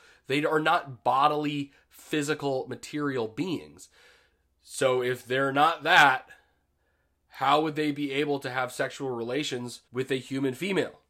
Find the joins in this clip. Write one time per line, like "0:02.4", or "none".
0:09.9